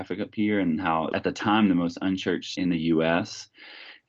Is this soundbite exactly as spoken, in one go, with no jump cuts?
no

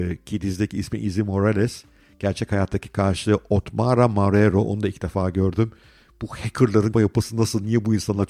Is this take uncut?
no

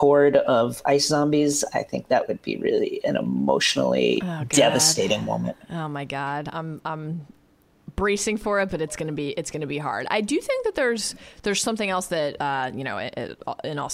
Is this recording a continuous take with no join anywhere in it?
yes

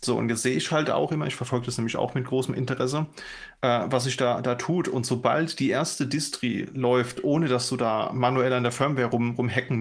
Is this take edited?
no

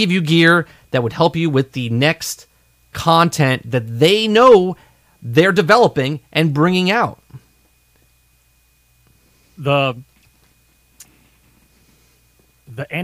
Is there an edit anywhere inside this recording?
no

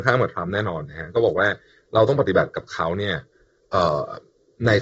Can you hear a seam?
no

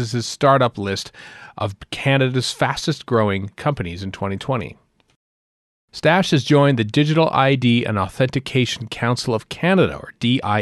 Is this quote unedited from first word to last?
yes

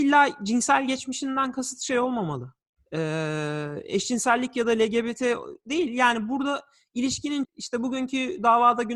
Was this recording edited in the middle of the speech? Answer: yes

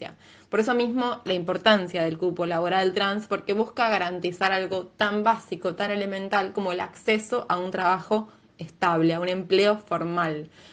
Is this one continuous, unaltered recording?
yes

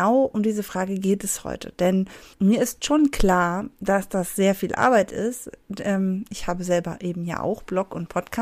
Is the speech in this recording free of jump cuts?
no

